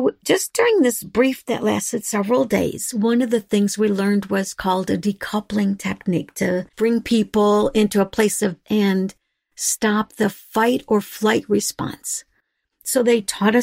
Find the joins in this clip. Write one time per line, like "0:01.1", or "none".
0:01.4
0:06.7
0:08.6